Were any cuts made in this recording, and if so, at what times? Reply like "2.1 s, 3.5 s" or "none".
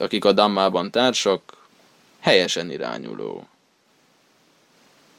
none

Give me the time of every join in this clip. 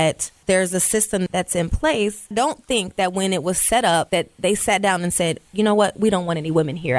2.3 s

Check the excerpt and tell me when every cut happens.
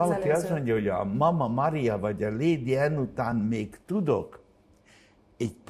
none

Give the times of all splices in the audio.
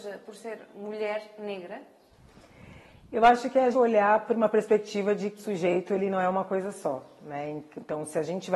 3.7 s, 5.4 s

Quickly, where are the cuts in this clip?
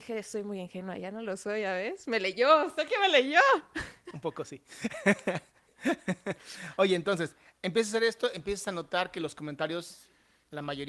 none

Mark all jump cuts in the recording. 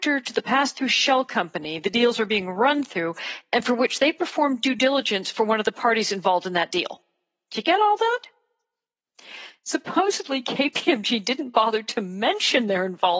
none

